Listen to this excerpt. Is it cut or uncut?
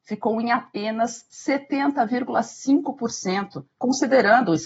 cut